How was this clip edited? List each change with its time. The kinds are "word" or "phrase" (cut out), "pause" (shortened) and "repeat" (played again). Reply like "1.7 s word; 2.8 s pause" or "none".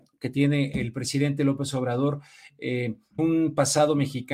3.2 s word